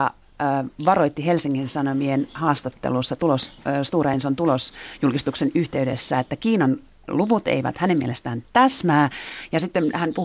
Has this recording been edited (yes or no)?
no